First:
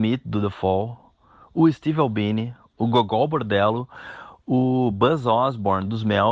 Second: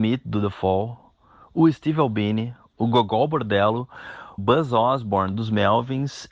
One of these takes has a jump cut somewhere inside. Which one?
second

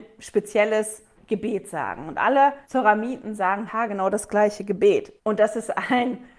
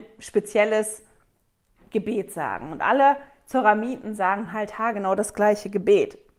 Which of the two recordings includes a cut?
first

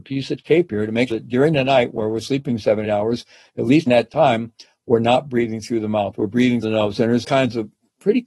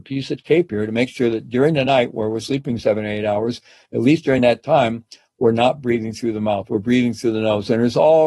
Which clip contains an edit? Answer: first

